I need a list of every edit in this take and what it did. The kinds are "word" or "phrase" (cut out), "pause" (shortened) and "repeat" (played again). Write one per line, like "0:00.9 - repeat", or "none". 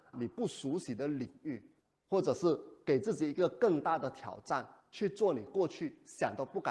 0:01.8 - pause